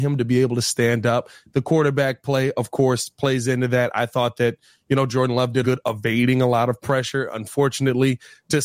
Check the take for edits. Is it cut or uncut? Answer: cut